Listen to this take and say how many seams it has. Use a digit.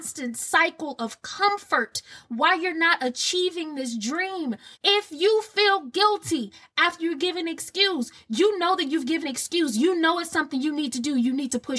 2